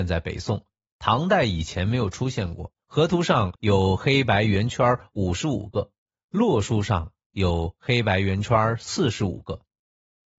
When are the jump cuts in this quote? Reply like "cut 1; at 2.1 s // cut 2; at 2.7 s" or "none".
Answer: cut 1; at 2.8 s // cut 2; at 3.6 s